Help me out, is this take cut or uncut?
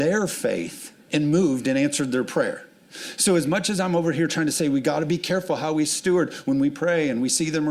cut